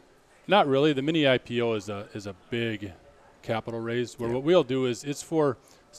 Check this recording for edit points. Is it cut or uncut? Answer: uncut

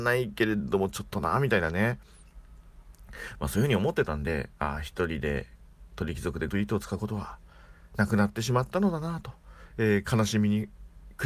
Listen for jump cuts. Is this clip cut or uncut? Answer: cut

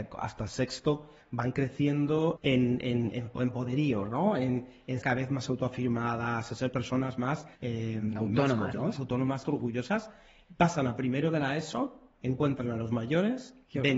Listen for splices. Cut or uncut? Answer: cut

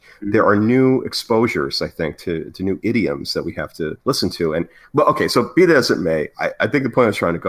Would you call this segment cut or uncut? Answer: cut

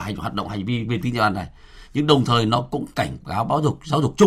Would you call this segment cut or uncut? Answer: uncut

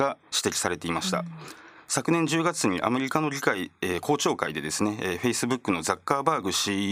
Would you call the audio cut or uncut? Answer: uncut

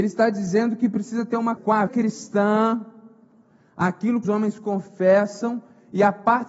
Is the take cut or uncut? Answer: cut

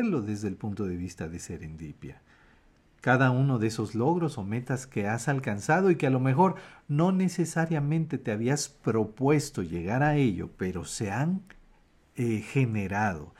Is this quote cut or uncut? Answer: uncut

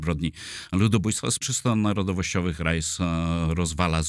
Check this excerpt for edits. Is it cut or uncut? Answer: cut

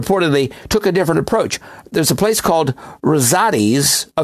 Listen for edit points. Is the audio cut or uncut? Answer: uncut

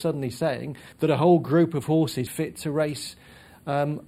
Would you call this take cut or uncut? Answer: cut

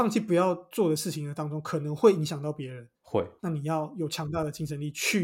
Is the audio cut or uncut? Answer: cut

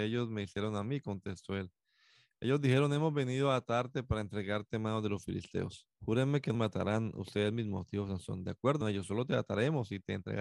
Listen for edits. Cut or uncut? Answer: cut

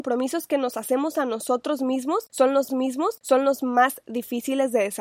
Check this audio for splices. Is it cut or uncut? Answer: cut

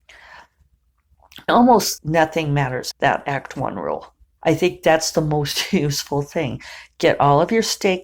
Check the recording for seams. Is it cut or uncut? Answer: cut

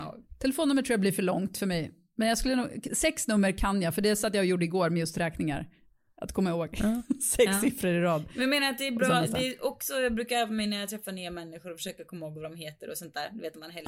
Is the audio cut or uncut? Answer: uncut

